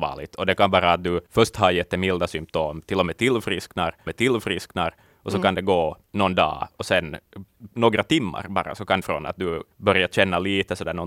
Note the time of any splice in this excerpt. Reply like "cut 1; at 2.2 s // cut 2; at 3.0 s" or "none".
cut 1; at 1.3 s // cut 2; at 4.1 s // cut 3; at 6.0 s // cut 4; at 7.5 s // cut 5; at 9.0 s // cut 6; at 9.7 s